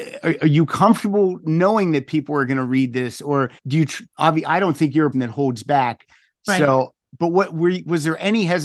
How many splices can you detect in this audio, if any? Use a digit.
4